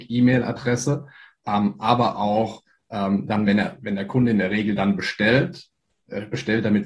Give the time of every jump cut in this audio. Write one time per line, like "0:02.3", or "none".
none